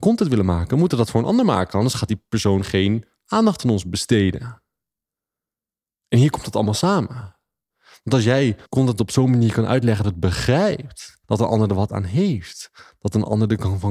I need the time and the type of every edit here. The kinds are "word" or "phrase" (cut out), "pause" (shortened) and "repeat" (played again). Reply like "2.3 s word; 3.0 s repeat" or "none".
8.7 s pause; 10.0 s phrase; 11.2 s pause